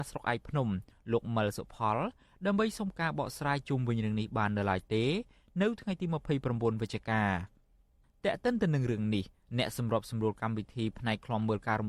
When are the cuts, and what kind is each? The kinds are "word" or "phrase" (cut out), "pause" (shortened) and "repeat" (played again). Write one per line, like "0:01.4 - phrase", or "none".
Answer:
none